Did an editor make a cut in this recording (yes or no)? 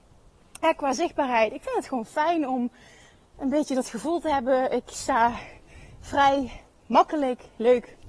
no